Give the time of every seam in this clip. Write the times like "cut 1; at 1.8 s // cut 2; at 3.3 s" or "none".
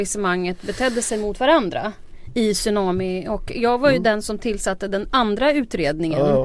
none